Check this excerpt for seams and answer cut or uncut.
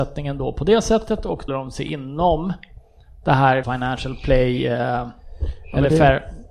cut